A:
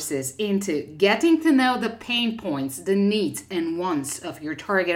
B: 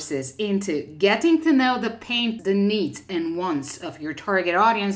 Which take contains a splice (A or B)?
B